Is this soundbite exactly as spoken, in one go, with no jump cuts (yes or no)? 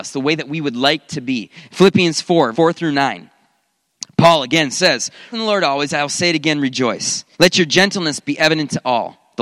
no